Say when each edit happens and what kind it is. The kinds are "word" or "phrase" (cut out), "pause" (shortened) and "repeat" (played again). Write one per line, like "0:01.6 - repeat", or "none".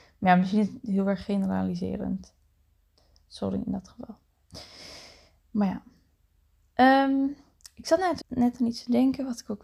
0:08.2 - word